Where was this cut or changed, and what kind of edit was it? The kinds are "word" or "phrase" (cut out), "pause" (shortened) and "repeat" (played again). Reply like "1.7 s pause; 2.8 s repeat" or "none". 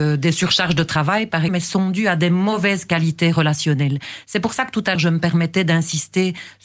1.5 s word; 5.0 s word